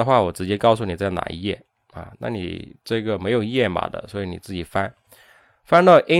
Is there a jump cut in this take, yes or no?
no